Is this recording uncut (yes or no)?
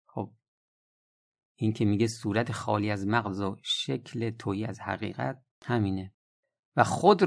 no